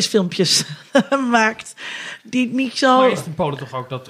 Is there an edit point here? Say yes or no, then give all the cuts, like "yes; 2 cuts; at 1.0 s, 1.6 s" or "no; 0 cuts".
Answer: no; 0 cuts